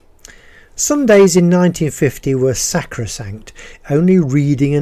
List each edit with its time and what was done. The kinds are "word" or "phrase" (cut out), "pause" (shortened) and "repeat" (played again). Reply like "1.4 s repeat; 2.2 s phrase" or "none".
none